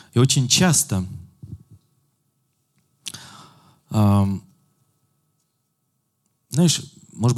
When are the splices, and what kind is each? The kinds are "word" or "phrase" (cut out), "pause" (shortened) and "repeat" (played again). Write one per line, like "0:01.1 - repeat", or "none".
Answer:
none